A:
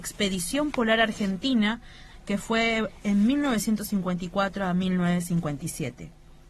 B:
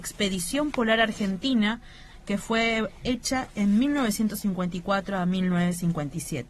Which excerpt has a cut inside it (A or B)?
A